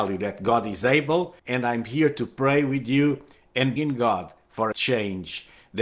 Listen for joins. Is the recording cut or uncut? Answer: cut